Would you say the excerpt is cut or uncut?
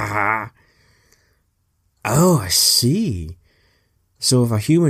uncut